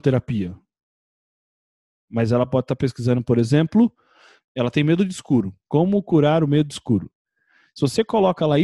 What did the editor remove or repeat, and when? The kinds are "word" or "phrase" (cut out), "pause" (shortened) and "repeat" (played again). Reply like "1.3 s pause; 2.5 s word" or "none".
none

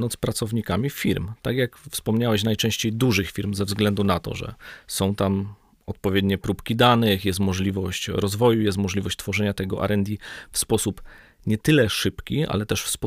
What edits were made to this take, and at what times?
none

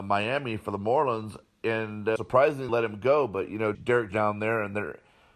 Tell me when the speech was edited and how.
2.2 s word; 2.7 s word; 3.7 s word; 4.1 s word

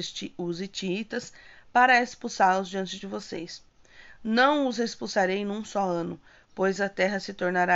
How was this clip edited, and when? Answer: none

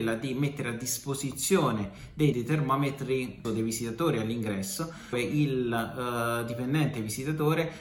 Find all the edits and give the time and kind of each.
2.3 s word; 3.4 s word; 5.1 s word

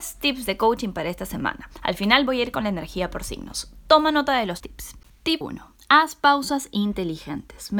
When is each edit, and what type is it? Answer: 4.6 s word; 5.4 s word

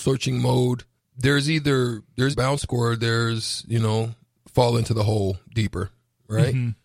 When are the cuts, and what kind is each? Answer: 1.0 s word; 2.3 s word; 2.7 s word; 4.4 s word

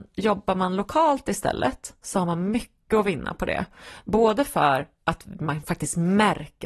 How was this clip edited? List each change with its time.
none

